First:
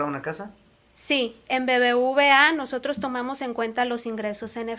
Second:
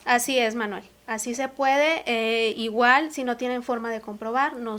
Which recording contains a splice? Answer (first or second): first